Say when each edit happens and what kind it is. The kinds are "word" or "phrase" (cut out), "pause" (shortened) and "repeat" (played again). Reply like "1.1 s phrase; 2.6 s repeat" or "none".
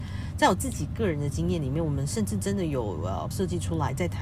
3.3 s word